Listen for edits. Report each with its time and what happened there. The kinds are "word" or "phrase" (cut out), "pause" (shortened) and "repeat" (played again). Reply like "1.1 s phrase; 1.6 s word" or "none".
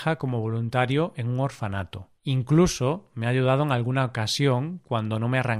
2.2 s pause